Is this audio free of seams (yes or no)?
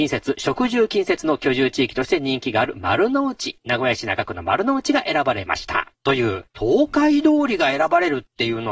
no